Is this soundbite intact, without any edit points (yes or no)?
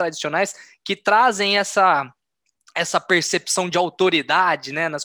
yes